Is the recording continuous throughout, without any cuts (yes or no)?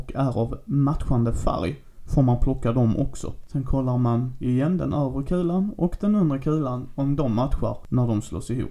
yes